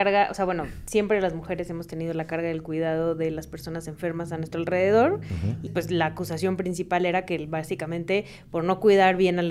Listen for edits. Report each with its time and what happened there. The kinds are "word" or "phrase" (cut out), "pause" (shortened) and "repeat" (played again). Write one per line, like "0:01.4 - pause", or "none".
0:05.7 - word